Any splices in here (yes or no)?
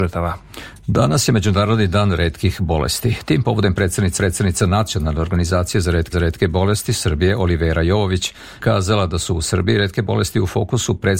yes